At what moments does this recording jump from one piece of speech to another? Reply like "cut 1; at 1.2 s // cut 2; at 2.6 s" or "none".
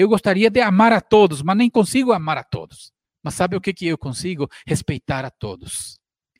cut 1; at 3.0 s